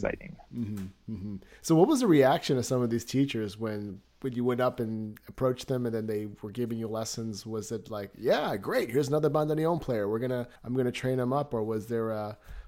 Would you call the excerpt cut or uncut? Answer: cut